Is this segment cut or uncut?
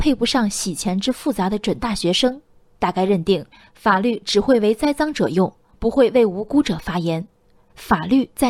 uncut